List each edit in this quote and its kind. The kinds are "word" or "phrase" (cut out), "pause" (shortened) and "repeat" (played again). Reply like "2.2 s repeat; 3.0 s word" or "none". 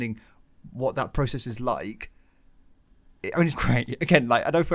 3.6 s word